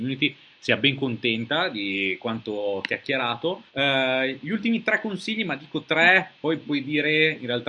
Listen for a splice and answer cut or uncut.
cut